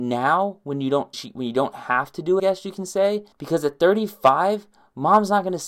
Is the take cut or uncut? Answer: cut